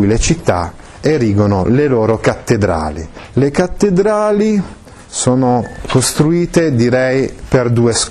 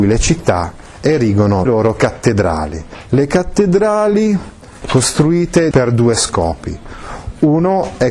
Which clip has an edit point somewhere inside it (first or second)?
second